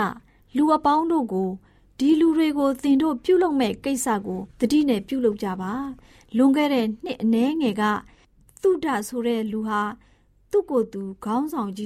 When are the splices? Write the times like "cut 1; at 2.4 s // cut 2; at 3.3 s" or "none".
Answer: cut 1; at 4.5 s